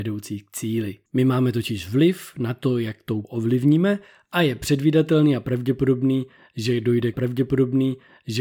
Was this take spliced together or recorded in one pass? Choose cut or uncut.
cut